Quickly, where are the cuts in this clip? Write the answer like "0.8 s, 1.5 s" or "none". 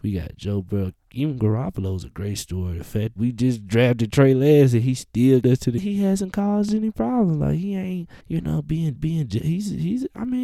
3.2 s, 5.4 s, 5.8 s, 8.2 s, 9.0 s

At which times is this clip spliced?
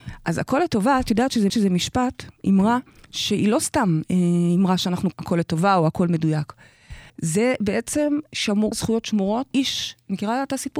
1.5 s, 2.9 s, 5.1 s, 7.1 s, 8.7 s, 9.5 s

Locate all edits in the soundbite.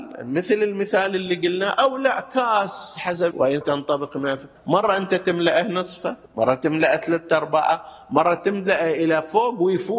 3.3 s, 3.6 s, 4.6 s, 6.3 s

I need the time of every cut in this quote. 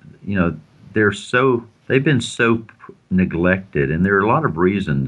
1.8 s

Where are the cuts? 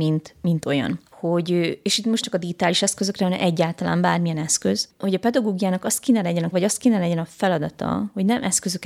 2.2 s, 4.9 s, 6.5 s

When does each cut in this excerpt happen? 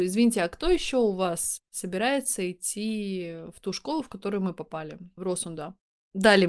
none

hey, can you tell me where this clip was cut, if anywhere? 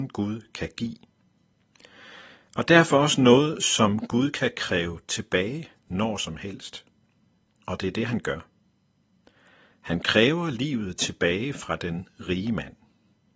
none

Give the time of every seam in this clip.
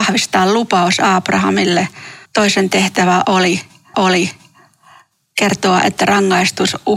2.3 s, 3.9 s

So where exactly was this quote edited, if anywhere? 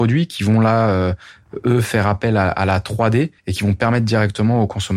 3.4 s

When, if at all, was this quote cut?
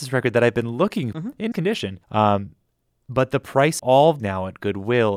1.1 s, 1.5 s, 2.0 s, 3.8 s, 4.2 s

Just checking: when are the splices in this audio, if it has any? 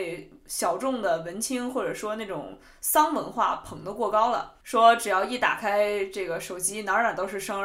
4.6 s

